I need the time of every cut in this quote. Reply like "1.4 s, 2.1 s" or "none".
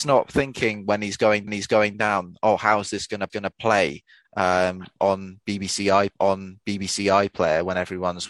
1.5 s, 3.3 s, 6.1 s

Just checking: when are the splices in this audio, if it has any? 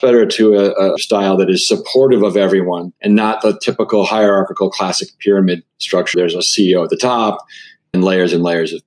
1.0 s, 3.0 s, 6.1 s, 7.9 s

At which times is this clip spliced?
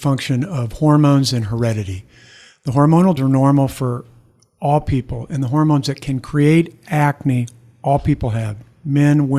3.2 s

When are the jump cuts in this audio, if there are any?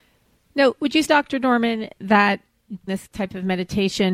1.0 s, 2.9 s

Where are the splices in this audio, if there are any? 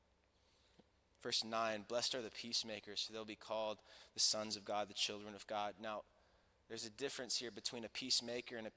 none

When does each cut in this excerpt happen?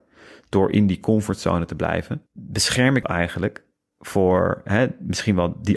2.3 s, 3.0 s

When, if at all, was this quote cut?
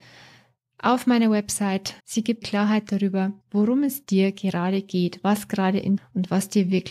2.0 s, 2.4 s, 3.4 s, 6.0 s

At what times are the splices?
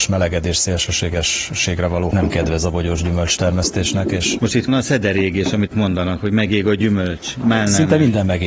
2.1 s, 4.7 s, 5.7 s

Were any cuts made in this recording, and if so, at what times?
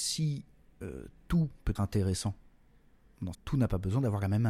1.8 s, 3.3 s

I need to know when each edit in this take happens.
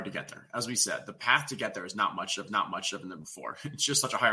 2.5 s

